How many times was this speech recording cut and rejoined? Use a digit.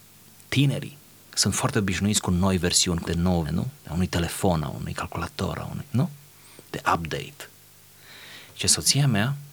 2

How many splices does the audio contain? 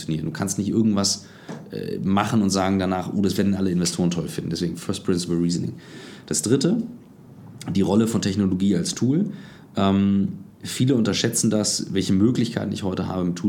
1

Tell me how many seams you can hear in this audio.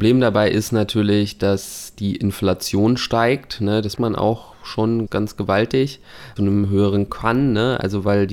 4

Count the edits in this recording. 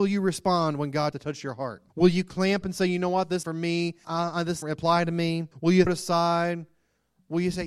8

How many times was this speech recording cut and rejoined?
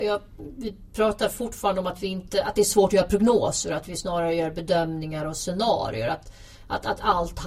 0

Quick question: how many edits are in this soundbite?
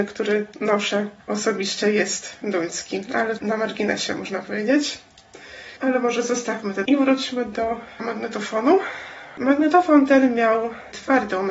5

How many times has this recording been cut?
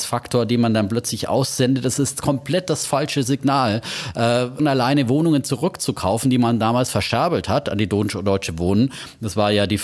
1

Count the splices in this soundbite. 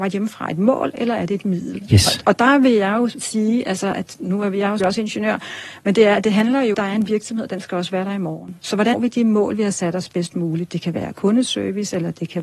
3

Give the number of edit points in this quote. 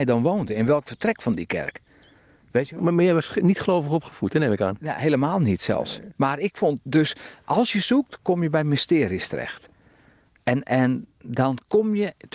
0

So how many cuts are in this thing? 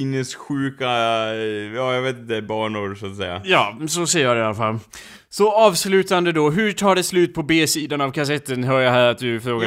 0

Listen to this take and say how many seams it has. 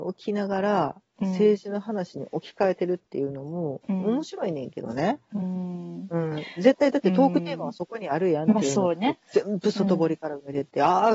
1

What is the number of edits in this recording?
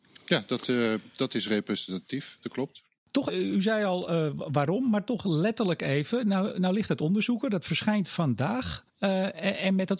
2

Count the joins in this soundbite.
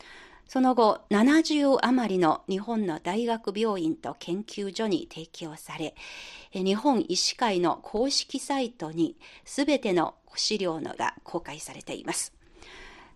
2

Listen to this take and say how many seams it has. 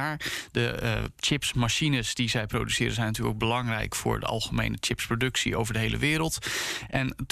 1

